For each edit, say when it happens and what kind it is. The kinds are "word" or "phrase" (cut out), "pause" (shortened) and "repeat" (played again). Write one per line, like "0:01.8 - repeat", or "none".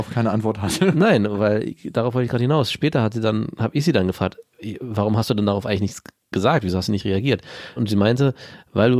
none

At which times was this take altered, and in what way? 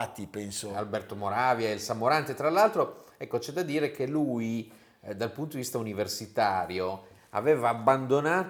none

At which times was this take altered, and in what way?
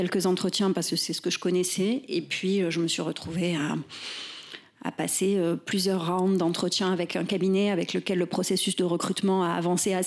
none

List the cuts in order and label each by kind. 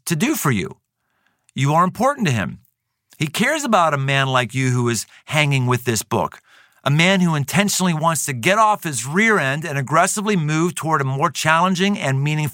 none

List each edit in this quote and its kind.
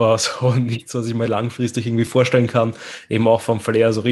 none

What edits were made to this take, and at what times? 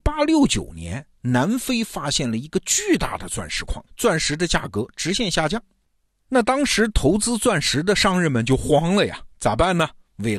0:03.9 - pause

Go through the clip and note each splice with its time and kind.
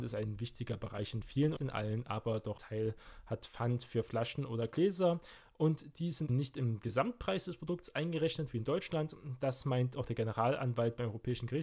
0:01.6 - phrase
0:02.6 - word
0:06.3 - word

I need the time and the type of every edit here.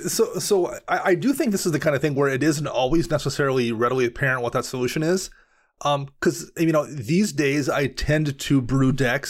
none

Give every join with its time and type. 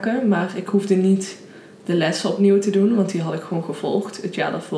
none

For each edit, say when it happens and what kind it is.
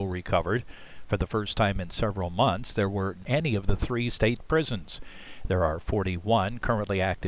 0:03.2 - phrase

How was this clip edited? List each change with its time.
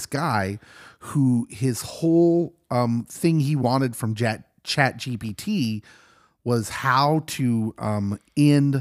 none

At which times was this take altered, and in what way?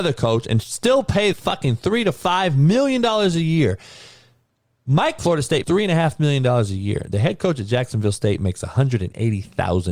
0:01.3 - word
0:05.2 - phrase
0:05.6 - word

